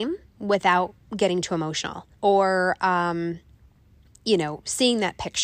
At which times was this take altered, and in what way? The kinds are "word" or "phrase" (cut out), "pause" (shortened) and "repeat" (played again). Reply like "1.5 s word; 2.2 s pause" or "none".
2.1 s pause